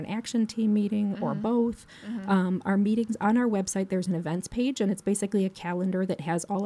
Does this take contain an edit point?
no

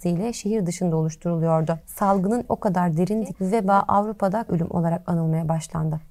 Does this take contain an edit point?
yes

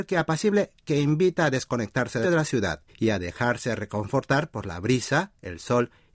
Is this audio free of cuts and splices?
no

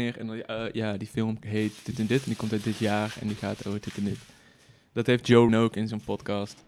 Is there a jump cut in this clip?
yes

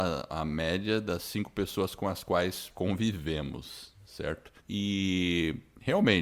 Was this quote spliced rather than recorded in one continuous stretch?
yes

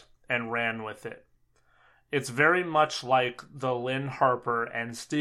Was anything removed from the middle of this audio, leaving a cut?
no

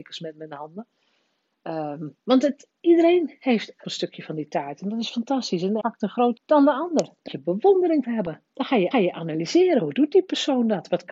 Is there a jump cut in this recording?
yes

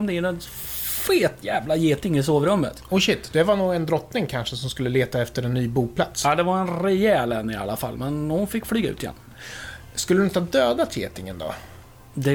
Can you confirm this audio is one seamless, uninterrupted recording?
yes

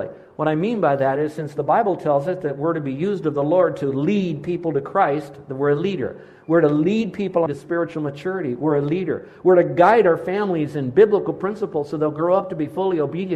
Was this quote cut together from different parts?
yes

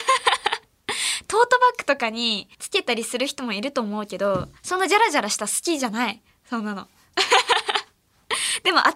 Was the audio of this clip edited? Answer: yes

